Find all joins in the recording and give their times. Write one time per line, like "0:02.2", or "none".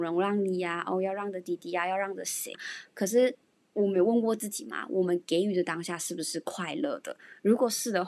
0:02.5
0:03.5